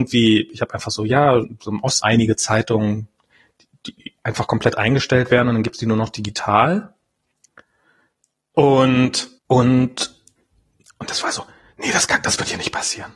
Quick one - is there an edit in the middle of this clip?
yes; 4 cuts; at 1.4 s, 2.0 s, 4.0 s, 9.4 s

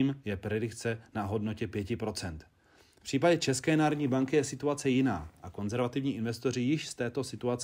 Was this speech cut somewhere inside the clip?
no; 0 cuts

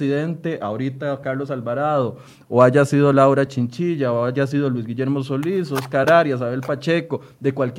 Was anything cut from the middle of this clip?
no; 0 cuts

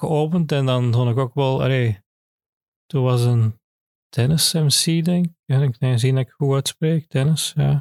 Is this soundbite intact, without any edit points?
yes; 0 cuts

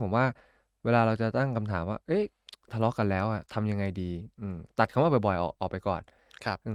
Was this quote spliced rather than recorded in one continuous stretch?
yes; 1 cut; at 3.5 s

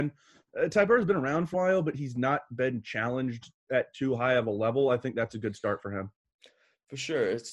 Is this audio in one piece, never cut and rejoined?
no; 1 cut; at 1.5 s

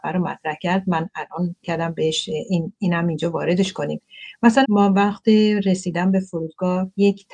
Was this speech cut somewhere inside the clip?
yes; 2 cuts; at 1.6 s, 4.6 s

